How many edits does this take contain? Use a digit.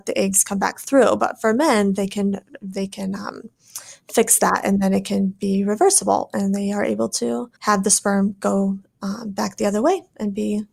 1